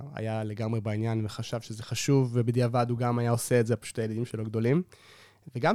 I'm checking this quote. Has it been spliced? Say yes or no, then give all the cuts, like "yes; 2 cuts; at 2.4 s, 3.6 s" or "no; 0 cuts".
no; 0 cuts